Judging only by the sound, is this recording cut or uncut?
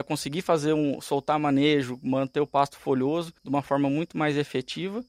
cut